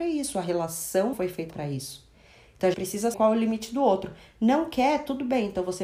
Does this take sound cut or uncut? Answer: cut